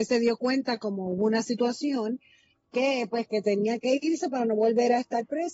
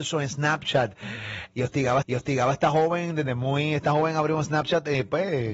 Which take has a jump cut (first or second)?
second